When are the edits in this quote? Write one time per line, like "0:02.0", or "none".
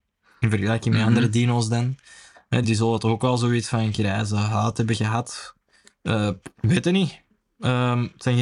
0:02.6

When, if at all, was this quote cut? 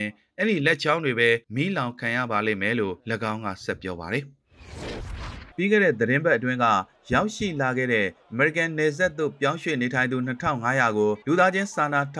0:01.4
0:03.0
0:05.5
0:11.2

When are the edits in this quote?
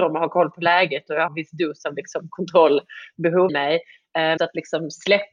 0:01.3
0:03.5
0:04.4

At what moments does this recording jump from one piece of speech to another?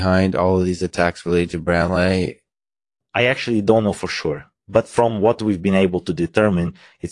none

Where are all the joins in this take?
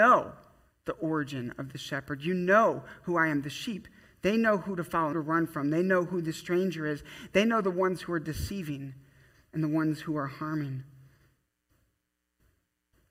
0:05.1

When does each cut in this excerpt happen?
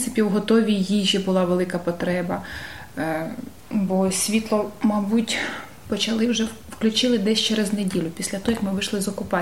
0:03.6

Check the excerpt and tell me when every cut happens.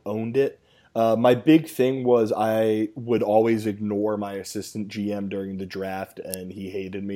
none

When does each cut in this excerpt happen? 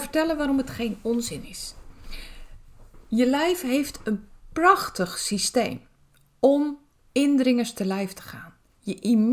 none

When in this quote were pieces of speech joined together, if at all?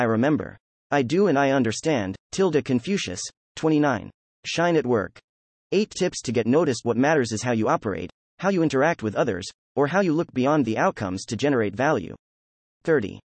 none

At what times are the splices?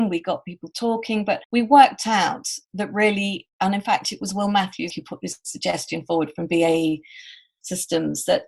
0:01.4
0:02.6
0:04.9

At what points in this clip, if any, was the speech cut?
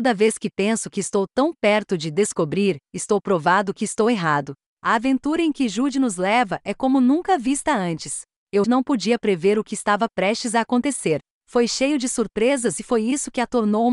0:08.6

